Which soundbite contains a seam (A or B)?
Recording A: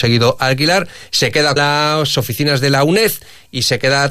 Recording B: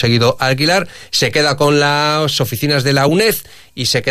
A